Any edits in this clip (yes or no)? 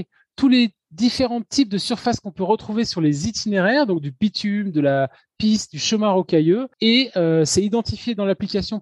no